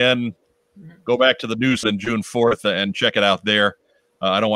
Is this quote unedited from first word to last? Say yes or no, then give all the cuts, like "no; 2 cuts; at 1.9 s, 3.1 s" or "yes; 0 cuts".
no; 1 cut; at 1.8 s